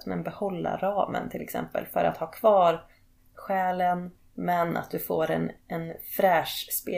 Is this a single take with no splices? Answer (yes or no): yes